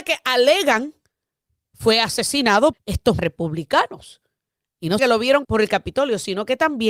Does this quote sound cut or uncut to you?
cut